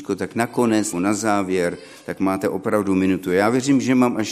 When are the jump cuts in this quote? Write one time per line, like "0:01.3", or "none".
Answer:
0:00.9